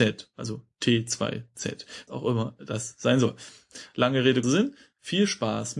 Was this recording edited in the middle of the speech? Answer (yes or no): yes